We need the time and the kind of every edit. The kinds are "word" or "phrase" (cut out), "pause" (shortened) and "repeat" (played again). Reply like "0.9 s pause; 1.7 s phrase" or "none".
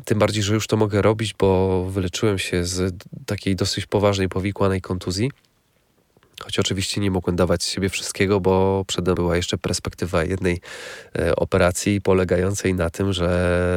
9.2 s word